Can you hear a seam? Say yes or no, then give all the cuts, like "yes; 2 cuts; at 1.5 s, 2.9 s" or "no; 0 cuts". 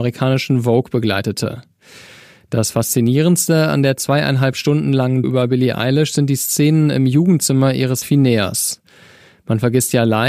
yes; 2 cuts; at 5.2 s, 8.0 s